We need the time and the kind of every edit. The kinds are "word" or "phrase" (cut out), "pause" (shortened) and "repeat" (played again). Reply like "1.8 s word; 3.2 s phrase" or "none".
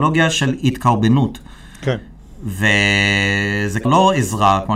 3.8 s word